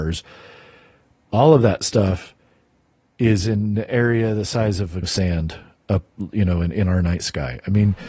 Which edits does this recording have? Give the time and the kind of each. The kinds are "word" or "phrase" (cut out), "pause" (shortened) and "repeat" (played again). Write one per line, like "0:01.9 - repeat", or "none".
0:05.0 - word